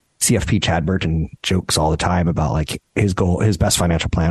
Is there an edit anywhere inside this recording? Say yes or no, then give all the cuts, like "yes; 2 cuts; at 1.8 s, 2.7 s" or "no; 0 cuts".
no; 0 cuts